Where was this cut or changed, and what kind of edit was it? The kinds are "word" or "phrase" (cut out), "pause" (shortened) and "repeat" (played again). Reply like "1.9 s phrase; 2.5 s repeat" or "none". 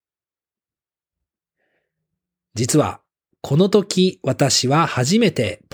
none